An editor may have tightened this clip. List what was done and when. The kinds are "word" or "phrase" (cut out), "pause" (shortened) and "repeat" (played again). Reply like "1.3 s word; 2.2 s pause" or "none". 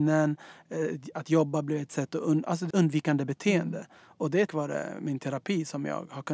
2.7 s word; 4.5 s word